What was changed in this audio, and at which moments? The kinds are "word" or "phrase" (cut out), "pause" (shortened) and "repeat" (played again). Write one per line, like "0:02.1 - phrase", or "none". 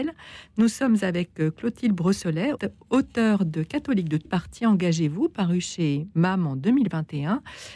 0:02.6 - word
0:04.3 - word